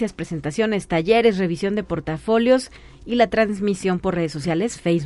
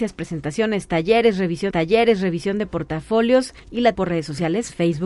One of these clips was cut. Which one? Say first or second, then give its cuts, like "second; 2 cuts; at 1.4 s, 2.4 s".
second; 3 cuts; at 1.7 s, 3.6 s, 3.9 s